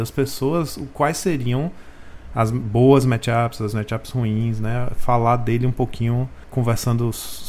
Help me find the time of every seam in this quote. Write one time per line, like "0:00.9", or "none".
none

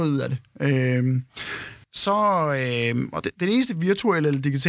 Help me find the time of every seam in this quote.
0:01.8
0:03.2

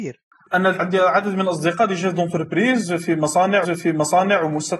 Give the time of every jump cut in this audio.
0:03.6

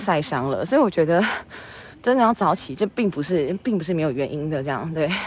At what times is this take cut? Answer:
0:01.9

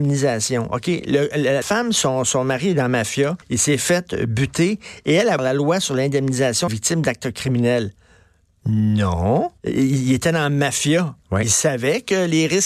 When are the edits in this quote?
0:01.6
0:03.4
0:05.4
0:06.7
0:09.6

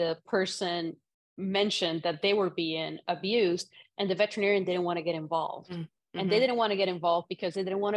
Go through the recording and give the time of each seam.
none

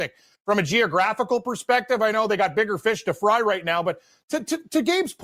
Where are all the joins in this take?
none

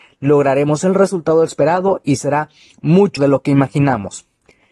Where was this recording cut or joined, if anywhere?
0:03.2

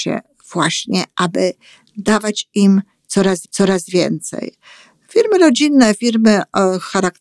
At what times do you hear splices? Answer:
0:03.4

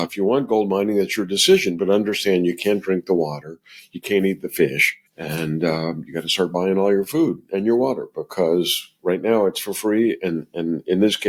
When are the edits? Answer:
0:05.1

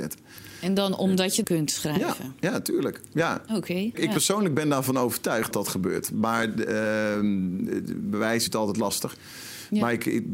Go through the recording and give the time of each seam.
0:01.4
0:03.9
0:05.5
0:08.5

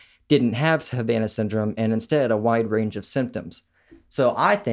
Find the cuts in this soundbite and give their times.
none

